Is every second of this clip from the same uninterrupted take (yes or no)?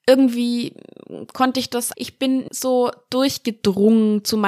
no